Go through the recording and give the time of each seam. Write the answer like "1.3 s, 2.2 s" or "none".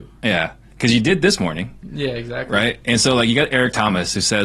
none